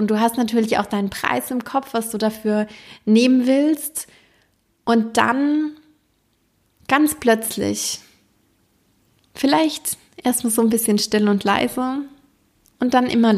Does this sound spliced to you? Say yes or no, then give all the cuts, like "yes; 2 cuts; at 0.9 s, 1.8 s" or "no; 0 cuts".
no; 0 cuts